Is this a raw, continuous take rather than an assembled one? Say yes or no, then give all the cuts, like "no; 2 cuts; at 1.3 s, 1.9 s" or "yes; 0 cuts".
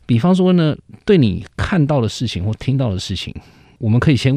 yes; 0 cuts